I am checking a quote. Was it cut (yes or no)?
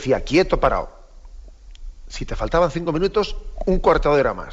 no